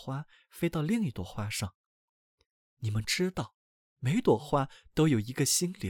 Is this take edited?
no; 0 cuts

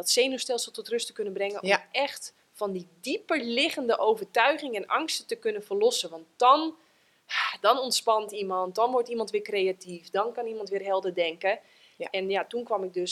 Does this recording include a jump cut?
no; 0 cuts

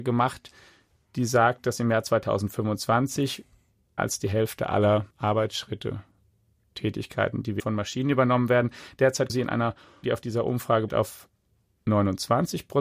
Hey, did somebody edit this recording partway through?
yes; 6 cuts; at 4.0 s, 5.1 s, 7.6 s, 9.3 s, 10.0 s, 10.9 s

